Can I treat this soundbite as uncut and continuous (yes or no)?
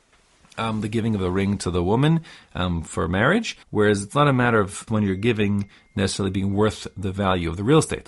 no